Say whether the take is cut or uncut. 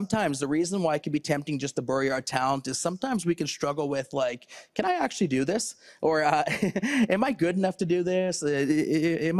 uncut